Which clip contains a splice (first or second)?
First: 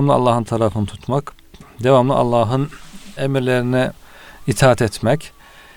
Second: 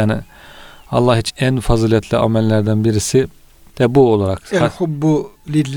second